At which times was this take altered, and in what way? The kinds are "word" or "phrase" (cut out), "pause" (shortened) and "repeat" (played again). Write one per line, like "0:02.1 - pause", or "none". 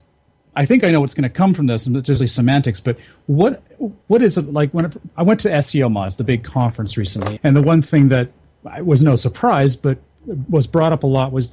0:02.2 - word
0:04.0 - pause
0:07.4 - word